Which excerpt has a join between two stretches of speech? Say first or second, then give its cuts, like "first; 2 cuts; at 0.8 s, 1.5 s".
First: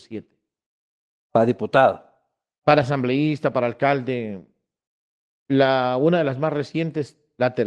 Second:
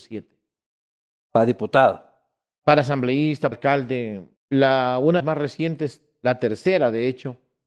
second; 3 cuts; at 3.5 s, 4.4 s, 5.2 s